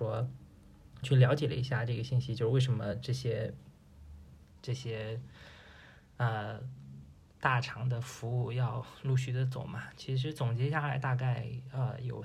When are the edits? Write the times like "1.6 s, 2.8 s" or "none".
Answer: 1.0 s, 7.2 s